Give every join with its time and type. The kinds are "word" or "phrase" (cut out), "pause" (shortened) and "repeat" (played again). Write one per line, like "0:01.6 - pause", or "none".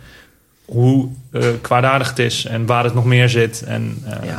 none